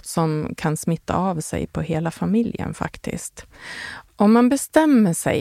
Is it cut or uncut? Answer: uncut